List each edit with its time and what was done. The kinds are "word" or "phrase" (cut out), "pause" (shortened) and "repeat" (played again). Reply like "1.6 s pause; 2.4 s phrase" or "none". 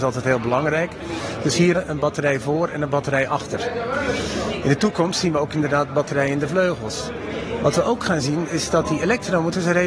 1.7 s word